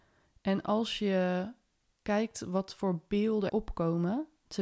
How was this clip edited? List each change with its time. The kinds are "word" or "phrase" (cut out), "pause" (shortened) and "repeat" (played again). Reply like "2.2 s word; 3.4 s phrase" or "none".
3.5 s word